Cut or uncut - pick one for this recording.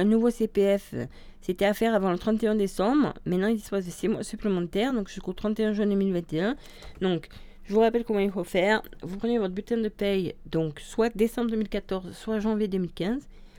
uncut